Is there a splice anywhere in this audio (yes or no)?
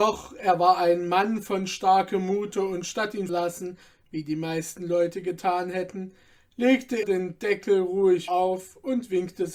yes